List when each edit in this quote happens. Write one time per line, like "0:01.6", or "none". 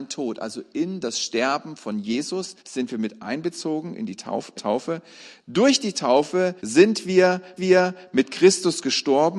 0:02.6
0:04.6
0:06.6
0:07.6